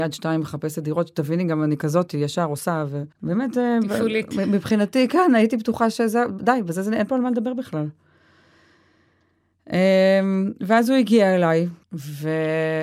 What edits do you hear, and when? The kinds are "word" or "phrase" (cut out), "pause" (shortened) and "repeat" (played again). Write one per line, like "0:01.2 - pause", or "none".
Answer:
0:03.1 - pause
0:11.8 - pause

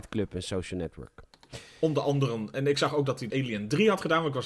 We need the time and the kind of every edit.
0:03.3 - word

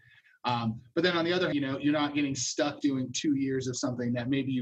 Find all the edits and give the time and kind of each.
0:01.5 - word

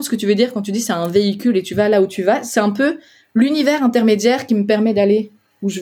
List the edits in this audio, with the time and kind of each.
none

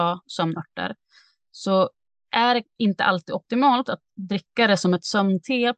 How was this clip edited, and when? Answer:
none

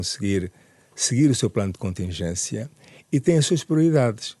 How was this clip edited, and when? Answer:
none

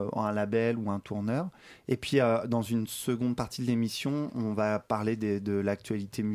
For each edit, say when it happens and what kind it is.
none

